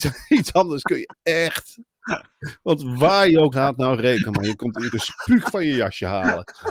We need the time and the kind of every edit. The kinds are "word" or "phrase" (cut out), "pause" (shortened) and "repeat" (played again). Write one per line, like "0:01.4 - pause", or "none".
0:03.5 - word
0:04.9 - word